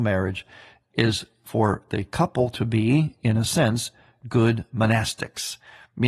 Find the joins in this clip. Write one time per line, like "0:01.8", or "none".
none